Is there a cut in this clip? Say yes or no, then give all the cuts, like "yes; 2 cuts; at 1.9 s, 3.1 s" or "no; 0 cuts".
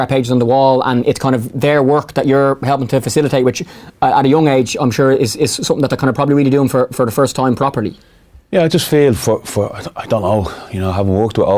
no; 0 cuts